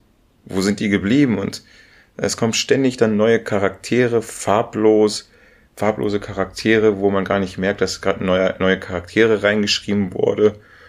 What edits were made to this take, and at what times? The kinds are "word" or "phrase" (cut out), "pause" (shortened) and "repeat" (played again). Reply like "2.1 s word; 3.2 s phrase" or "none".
none